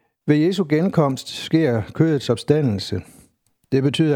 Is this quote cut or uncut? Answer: uncut